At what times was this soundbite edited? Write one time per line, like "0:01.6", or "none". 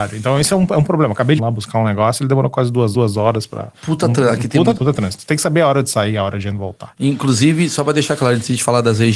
0:01.4
0:02.9
0:03.7
0:04.7